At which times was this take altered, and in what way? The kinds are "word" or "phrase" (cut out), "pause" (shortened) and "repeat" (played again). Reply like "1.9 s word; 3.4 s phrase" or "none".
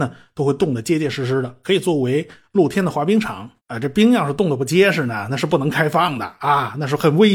3.6 s pause

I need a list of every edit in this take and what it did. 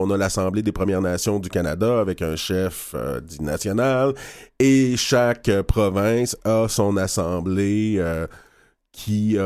none

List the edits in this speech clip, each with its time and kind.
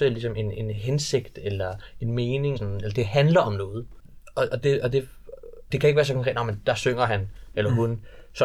2.6 s word; 5.7 s word

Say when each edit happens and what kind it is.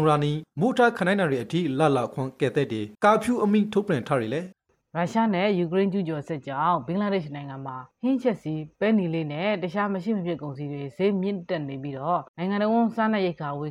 2.9 s pause; 4.5 s pause; 7.9 s pause; 12.3 s pause

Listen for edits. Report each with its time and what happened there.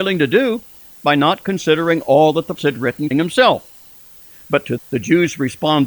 2.6 s word; 3.1 s word; 4.8 s word

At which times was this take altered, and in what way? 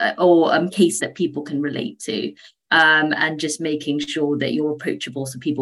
1.0 s word

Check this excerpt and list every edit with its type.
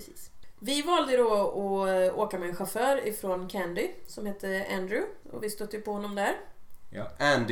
none

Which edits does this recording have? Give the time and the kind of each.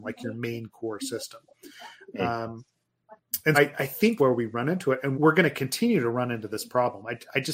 3.5 s word; 4.2 s word; 5.1 s word

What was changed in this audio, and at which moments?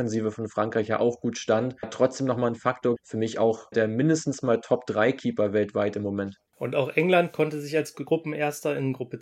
1.8 s word; 3.0 s word; 3.7 s word; 6.5 s pause

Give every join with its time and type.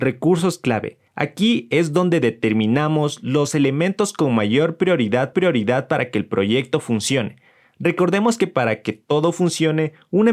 1.1 s pause; 5.3 s repeat

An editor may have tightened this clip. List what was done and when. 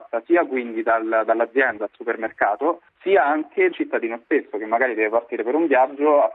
1.8 s word; 2.9 s pause; 3.7 s word

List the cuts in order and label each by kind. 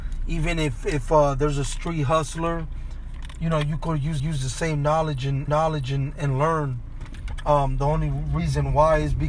4.2 s repeat; 5.5 s repeat

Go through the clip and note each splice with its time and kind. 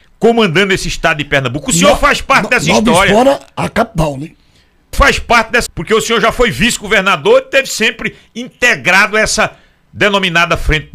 4.9 s word; 5.7 s word

